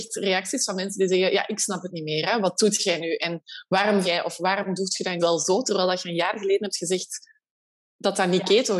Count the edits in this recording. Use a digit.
2